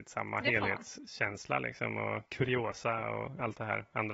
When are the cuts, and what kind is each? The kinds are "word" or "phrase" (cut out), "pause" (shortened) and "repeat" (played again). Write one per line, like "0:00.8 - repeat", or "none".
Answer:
none